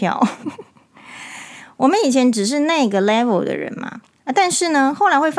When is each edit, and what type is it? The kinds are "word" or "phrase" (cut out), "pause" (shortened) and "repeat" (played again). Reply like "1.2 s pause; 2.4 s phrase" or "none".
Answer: 4.2 s pause